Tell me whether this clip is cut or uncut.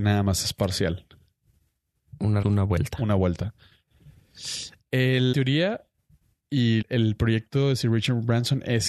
cut